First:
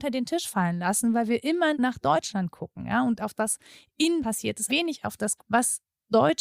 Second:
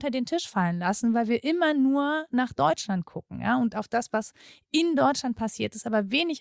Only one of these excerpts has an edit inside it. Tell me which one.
first; 5 cuts; at 1.7 s, 3.3 s, 4.2 s, 4.7 s, 5.4 s

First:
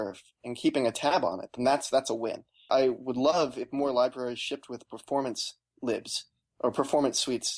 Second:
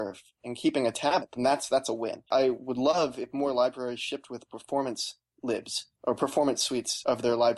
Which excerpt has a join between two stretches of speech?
second; 3 cuts; at 1.2 s, 2.3 s, 5.9 s

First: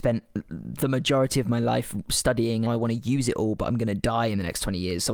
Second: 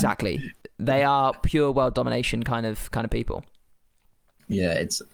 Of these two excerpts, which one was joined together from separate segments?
first; 1 cut; at 2.7 s

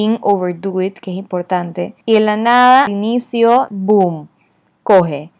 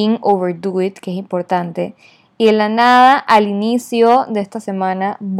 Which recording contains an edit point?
first; 3 cuts; at 2.0 s, 2.9 s, 3.7 s

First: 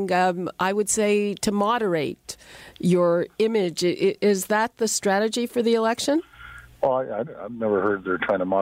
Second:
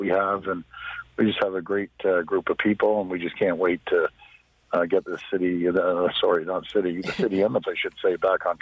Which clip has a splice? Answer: second; 1 cut; at 7.6 s

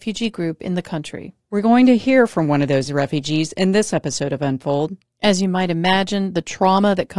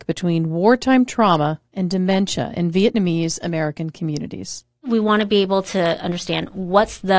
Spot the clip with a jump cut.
first; 1 cut; at 1.4 s

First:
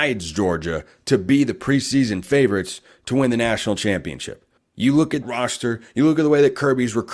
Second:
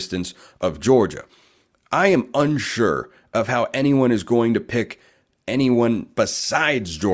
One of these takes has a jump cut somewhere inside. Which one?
first; 2 cuts; at 4.6 s, 5.2 s

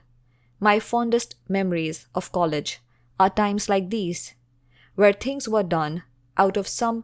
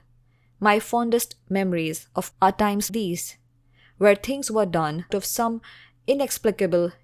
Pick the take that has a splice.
second; 3 cuts; at 2.3 s, 2.9 s, 5.1 s

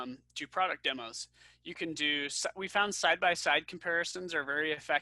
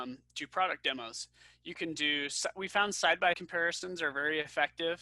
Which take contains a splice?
second; 1 cut; at 3.3 s

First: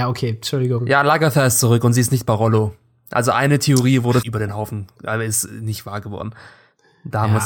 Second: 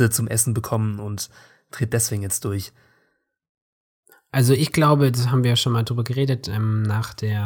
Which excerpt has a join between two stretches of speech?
first; 1 cut; at 4.2 s

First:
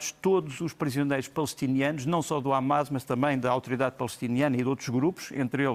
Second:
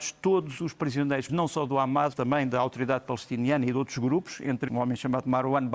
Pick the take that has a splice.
second; 3 cuts; at 1.3 s, 2.1 s, 4.7 s

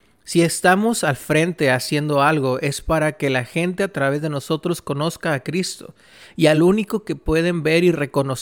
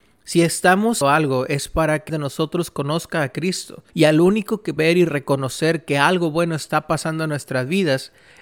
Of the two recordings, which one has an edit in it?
second; 4 cuts; at 1.0 s, 2.1 s, 3.9 s, 4.8 s

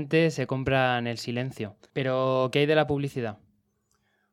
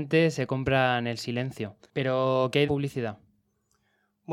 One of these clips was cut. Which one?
second; 1 cut; at 2.7 s

